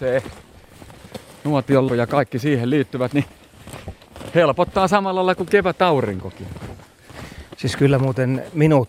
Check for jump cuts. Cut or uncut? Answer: cut